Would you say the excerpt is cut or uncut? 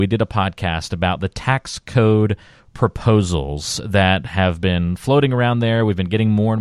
uncut